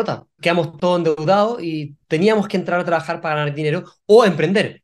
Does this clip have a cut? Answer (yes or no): no